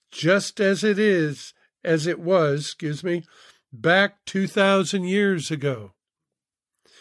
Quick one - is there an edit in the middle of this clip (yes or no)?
no